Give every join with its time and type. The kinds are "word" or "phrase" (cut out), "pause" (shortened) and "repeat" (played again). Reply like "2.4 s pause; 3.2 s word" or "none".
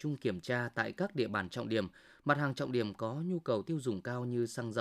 none